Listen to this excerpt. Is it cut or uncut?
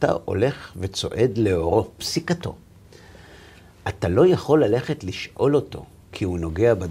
cut